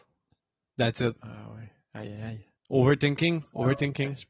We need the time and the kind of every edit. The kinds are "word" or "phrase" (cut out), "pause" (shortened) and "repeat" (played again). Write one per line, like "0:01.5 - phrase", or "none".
0:02.6 - pause